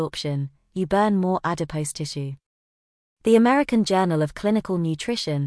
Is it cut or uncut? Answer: uncut